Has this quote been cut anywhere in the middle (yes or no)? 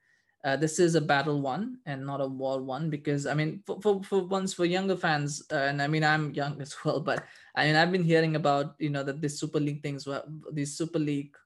no